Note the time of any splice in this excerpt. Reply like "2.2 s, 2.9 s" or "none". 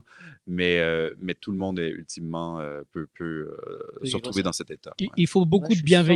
none